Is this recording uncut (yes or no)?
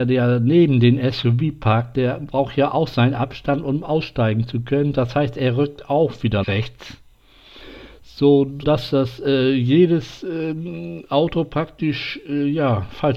no